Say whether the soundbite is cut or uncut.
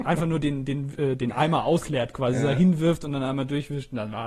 uncut